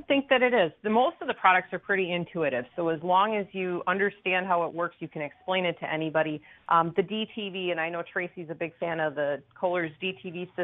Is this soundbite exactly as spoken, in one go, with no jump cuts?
yes; 0 cuts

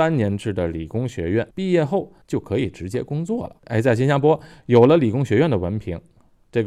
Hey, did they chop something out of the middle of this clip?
yes; 3 cuts; at 1.5 s, 2.2 s, 3.6 s

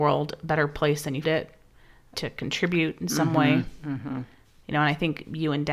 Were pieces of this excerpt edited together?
yes; 2 cuts; at 1.2 s, 2.1 s

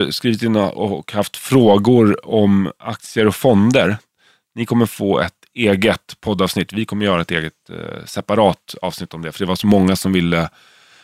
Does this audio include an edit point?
no; 0 cuts

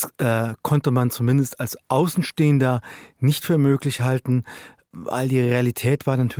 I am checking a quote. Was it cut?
no; 0 cuts

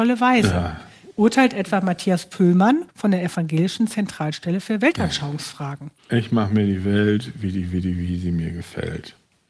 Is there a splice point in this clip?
yes; 2 cuts; at 2.9 s, 6.0 s

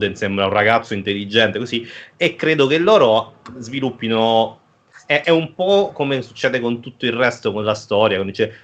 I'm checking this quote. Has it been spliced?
yes; 1 cut; at 5.2 s

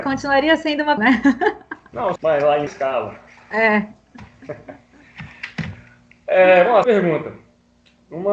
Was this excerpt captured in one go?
no; 4 cuts; at 1.0 s, 2.2 s, 2.7 s, 6.8 s

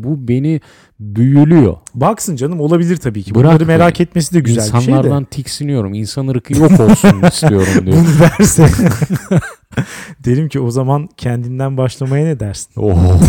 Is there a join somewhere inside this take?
no; 0 cuts

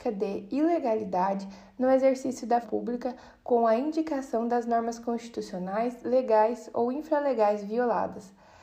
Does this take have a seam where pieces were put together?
yes; 1 cut; at 2.6 s

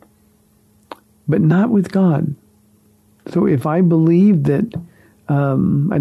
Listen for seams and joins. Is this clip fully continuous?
yes; 0 cuts

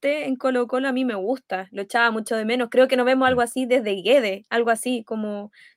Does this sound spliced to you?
no; 0 cuts

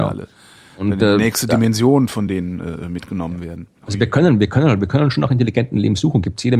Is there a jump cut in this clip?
no; 0 cuts

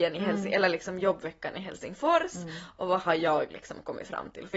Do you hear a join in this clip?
no; 0 cuts

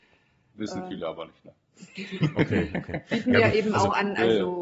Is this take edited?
no; 0 cuts

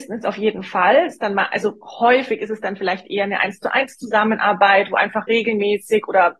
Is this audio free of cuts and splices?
yes; 0 cuts

